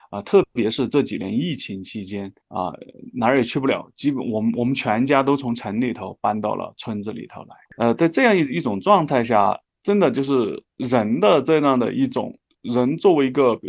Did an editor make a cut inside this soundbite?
yes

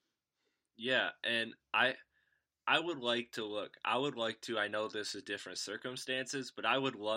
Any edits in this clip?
no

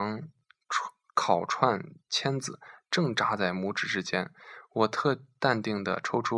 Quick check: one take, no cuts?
yes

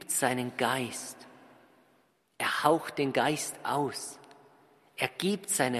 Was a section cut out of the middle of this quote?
no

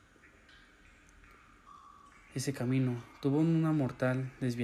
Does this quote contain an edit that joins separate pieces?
no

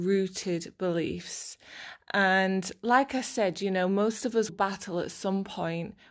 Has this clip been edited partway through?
yes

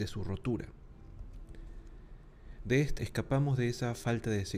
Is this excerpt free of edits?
no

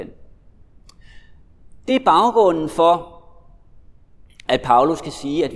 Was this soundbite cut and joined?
no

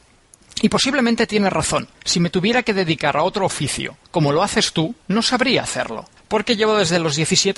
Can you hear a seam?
yes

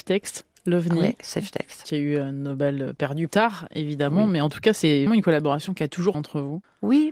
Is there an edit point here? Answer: yes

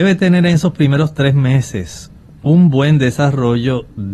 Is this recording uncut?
yes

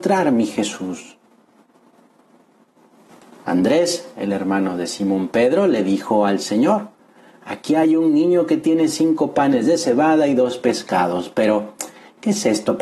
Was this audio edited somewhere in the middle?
no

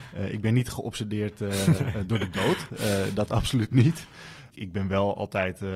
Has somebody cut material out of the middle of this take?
no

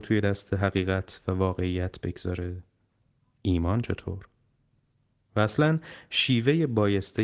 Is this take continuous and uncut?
yes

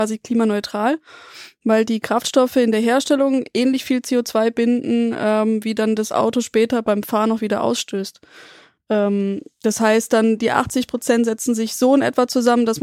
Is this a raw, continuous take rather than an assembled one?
yes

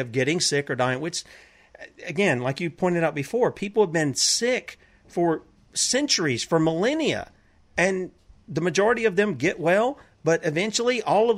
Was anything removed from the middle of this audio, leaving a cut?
no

